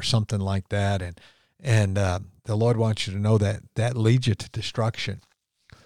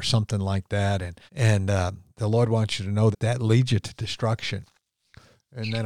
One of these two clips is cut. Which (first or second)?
second